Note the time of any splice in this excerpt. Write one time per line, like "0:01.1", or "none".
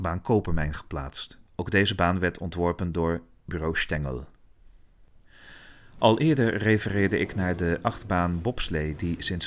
0:01.5

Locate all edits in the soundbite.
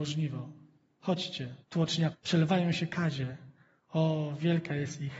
0:01.6
0:02.1

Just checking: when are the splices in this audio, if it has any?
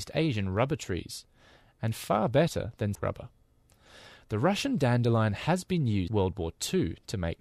0:02.9
0:06.1

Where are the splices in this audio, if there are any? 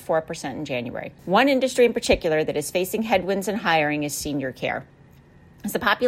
0:01.2

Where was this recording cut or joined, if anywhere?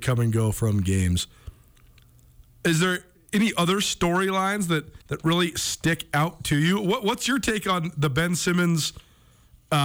0:05.0

